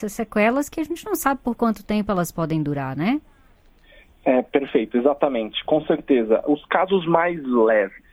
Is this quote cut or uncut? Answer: uncut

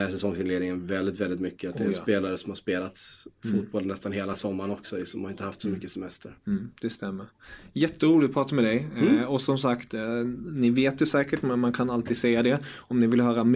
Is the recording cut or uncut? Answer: uncut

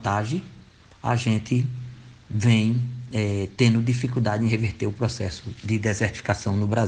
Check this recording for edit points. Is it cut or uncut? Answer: uncut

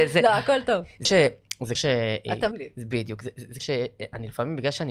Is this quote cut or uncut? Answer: cut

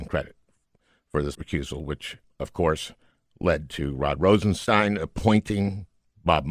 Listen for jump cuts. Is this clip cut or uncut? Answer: cut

